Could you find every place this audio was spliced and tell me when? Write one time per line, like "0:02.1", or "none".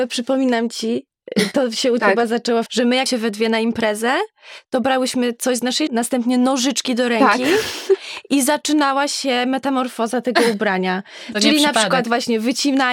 0:02.0
0:02.7
0:03.1
0:05.9